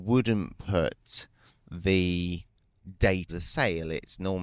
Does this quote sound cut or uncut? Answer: cut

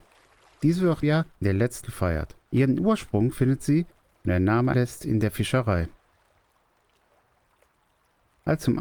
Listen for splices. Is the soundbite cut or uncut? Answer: cut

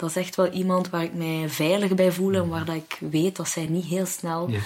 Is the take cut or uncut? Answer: uncut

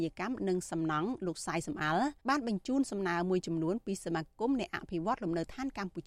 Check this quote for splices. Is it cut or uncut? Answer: cut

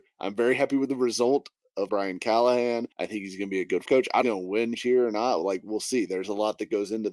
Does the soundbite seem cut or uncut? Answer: cut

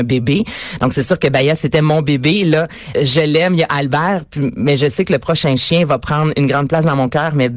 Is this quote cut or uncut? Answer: cut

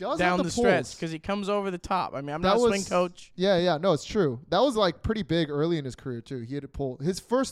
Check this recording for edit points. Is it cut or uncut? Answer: uncut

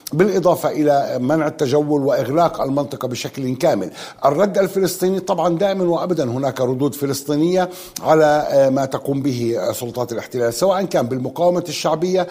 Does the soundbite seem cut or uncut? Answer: uncut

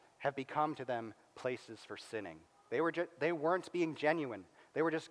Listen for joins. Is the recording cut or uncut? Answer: cut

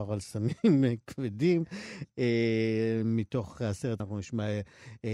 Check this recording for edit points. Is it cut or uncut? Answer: cut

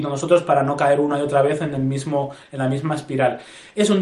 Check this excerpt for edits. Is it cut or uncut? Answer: uncut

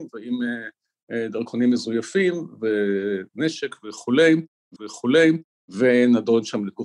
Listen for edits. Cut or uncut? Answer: cut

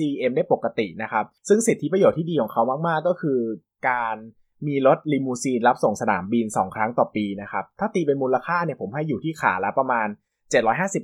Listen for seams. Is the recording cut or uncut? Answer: uncut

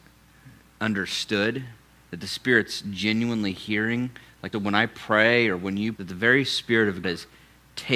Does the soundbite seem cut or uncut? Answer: cut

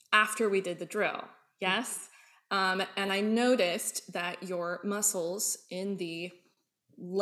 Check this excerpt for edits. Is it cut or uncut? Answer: uncut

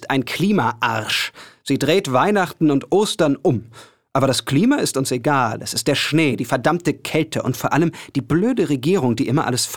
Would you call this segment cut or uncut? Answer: uncut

